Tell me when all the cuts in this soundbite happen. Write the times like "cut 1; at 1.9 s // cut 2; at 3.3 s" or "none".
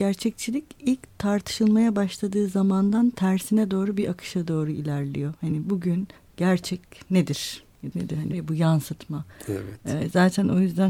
cut 1; at 6.2 s // cut 2; at 7.9 s // cut 3; at 8.3 s